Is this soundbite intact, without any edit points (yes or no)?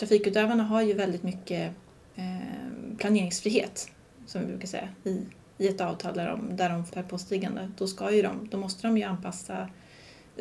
no